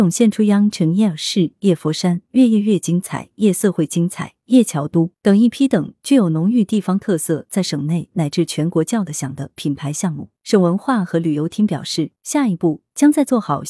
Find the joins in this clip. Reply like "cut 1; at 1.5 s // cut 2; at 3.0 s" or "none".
cut 1; at 5.1 s // cut 2; at 10.4 s // cut 3; at 12.2 s